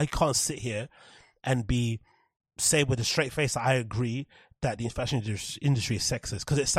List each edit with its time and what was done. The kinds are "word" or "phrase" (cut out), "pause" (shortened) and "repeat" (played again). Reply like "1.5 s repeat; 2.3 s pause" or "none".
none